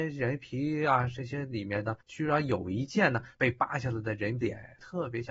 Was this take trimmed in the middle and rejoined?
yes; 1 cut; at 2.0 s

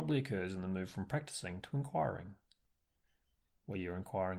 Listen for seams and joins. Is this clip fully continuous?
yes; 0 cuts

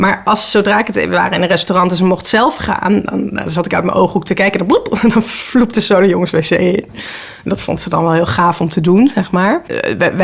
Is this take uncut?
yes; 0 cuts

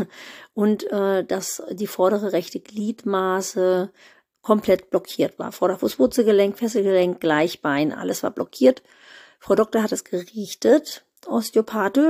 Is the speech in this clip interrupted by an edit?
no; 0 cuts

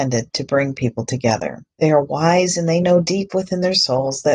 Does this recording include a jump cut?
yes; 1 cut; at 1.7 s

